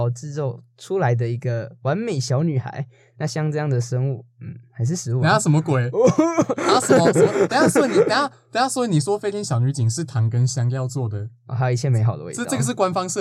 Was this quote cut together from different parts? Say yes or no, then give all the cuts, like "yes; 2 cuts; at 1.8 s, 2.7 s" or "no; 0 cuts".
no; 0 cuts